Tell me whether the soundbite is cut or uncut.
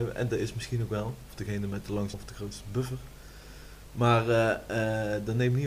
cut